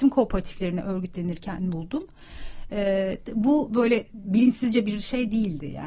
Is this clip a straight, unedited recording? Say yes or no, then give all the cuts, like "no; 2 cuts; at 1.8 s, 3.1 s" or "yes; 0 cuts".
yes; 0 cuts